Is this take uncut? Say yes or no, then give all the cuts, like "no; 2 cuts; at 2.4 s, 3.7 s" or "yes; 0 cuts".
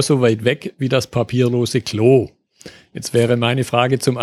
yes; 0 cuts